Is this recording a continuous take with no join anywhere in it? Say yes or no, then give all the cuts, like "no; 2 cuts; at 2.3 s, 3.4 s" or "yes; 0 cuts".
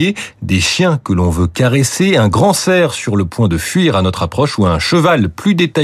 yes; 0 cuts